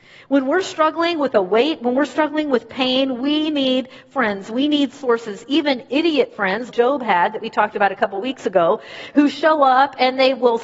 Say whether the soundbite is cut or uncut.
cut